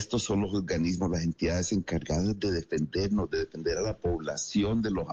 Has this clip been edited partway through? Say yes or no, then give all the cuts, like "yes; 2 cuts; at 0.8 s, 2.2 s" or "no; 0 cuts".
no; 0 cuts